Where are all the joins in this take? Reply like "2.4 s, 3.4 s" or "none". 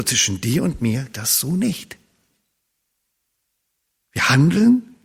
1.1 s